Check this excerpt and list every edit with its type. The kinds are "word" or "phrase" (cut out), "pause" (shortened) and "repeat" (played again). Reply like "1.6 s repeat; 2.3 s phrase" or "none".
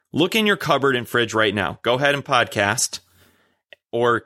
2.2 s phrase